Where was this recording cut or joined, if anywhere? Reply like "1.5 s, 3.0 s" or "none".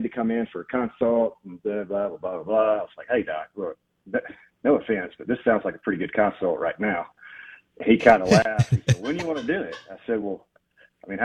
none